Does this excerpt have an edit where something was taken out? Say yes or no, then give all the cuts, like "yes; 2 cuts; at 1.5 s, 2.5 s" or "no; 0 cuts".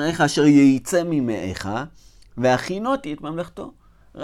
no; 0 cuts